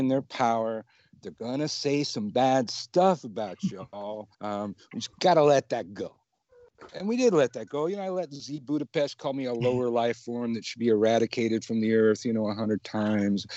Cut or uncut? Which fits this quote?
cut